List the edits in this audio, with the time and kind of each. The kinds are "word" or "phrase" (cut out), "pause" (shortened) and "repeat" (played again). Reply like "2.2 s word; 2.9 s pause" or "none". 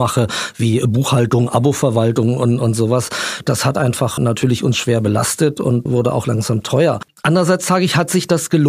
4.2 s word; 5.9 s word